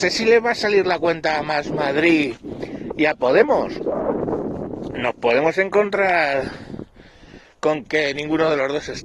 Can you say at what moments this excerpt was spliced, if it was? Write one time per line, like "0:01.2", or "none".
0:07.8